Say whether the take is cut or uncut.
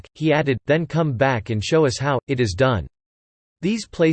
uncut